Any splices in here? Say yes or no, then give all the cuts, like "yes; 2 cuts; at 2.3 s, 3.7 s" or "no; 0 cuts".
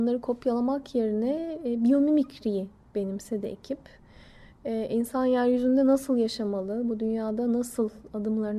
no; 0 cuts